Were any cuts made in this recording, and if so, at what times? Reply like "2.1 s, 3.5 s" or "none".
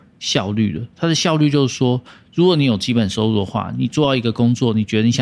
none